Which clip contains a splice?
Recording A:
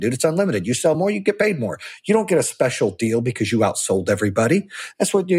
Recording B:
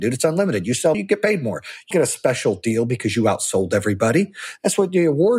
B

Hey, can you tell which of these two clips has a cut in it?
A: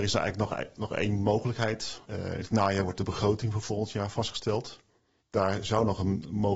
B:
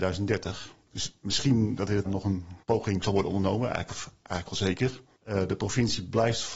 B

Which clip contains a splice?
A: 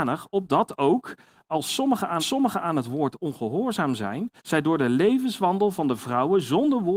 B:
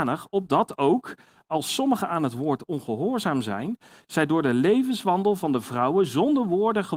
A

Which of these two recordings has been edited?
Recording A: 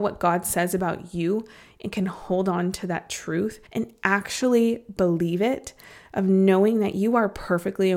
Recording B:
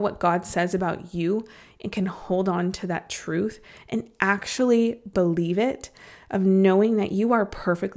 A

